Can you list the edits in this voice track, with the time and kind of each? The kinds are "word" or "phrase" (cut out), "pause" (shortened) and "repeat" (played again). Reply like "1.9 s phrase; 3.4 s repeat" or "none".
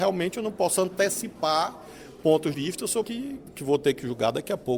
2.5 s word; 3.0 s word; 3.5 s word